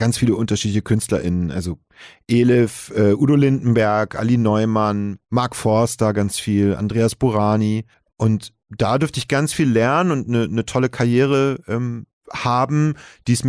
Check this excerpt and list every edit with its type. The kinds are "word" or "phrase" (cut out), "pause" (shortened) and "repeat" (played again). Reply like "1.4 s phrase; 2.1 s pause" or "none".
7.9 s pause